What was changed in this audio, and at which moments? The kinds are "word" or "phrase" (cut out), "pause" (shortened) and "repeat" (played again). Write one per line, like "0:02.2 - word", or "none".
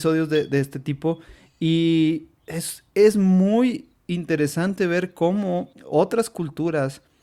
0:05.7 - pause